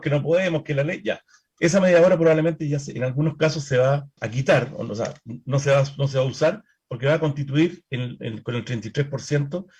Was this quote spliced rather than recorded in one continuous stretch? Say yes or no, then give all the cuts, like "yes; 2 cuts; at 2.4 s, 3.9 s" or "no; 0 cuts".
yes; 1 cut; at 4.2 s